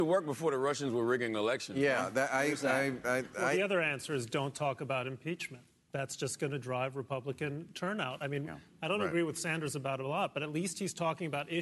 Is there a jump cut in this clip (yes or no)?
no